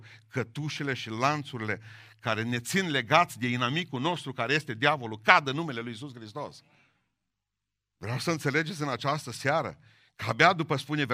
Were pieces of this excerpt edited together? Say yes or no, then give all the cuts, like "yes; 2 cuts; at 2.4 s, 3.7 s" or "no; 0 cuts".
no; 0 cuts